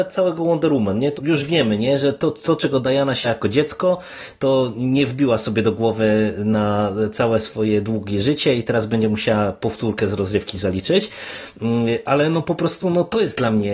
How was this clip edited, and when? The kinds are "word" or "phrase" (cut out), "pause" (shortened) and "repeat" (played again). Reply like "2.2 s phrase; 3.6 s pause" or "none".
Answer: 1.2 s word; 3.2 s word